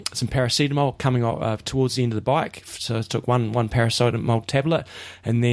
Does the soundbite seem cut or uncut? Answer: uncut